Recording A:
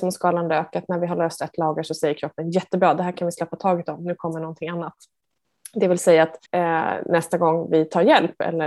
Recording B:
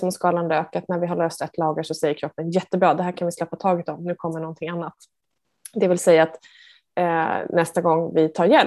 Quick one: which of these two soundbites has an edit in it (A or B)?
A